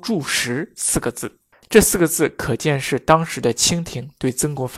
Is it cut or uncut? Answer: uncut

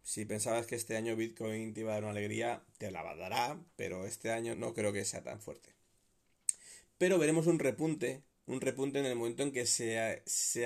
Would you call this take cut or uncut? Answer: cut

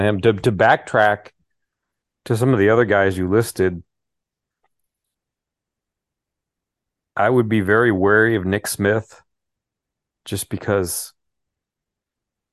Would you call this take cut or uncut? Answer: uncut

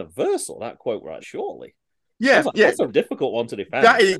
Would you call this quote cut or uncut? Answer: cut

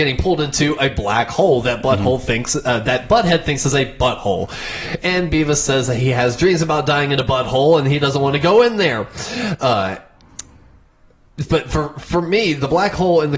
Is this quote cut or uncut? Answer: uncut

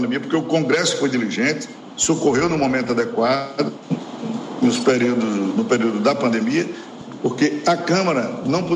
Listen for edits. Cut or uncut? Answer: uncut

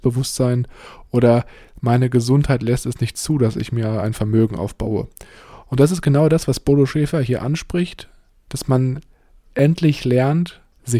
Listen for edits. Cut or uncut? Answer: uncut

